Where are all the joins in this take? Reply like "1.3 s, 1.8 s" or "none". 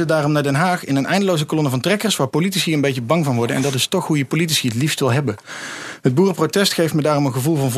none